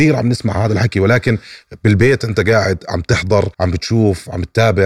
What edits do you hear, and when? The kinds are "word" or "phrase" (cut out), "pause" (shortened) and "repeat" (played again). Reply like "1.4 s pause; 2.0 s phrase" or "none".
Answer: 3.5 s pause